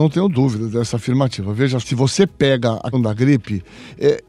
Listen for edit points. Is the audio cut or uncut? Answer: cut